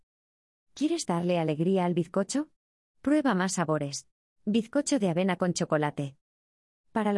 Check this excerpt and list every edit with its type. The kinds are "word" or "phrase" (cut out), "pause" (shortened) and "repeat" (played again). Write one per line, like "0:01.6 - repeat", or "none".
0:04.2 - pause